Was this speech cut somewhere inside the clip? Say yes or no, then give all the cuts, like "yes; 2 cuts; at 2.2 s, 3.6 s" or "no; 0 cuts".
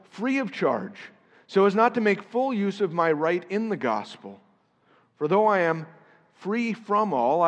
no; 0 cuts